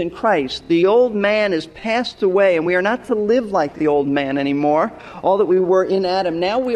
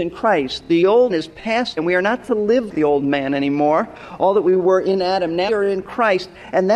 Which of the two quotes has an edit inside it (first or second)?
second